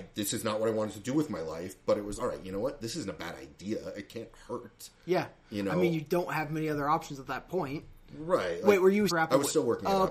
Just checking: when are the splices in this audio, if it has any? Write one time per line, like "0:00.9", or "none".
0:02.2
0:09.1